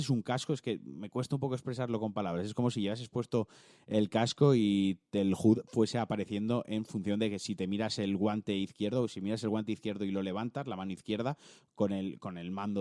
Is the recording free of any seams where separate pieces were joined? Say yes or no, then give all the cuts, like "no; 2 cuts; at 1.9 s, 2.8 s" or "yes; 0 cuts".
yes; 0 cuts